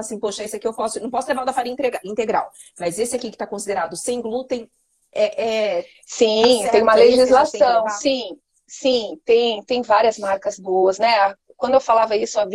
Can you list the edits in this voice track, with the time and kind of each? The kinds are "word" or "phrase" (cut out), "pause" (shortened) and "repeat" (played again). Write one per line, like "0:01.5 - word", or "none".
none